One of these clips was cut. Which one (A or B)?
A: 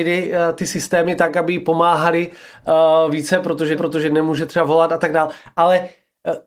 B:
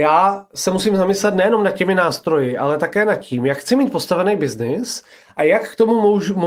A